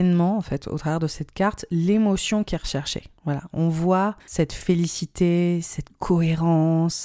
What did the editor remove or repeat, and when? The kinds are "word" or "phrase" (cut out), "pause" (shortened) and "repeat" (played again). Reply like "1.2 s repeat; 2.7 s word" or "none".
3.2 s pause; 4.2 s pause